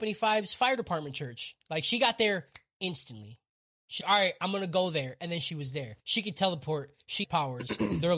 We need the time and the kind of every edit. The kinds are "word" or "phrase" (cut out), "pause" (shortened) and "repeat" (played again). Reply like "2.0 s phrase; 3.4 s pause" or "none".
4.0 s word; 6.0 s pause; 7.2 s word